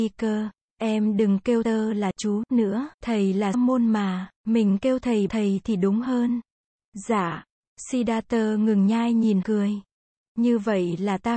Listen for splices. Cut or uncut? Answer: cut